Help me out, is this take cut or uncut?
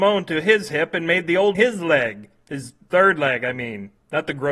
cut